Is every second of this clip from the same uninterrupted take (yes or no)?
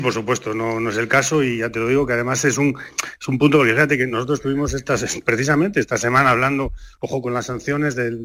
yes